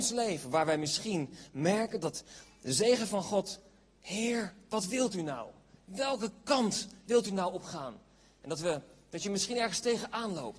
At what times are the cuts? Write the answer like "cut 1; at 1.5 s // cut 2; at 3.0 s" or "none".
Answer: none